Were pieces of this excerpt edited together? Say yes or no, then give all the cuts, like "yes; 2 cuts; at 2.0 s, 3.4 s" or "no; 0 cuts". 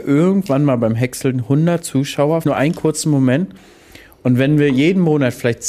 yes; 1 cut; at 2.4 s